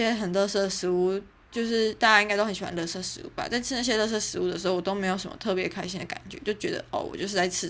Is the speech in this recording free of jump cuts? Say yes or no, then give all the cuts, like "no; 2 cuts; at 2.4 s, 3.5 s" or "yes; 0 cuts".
yes; 0 cuts